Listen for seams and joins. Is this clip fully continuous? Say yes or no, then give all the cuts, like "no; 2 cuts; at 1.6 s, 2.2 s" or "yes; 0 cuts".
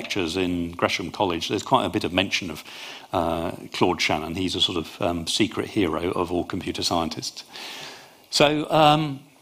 yes; 0 cuts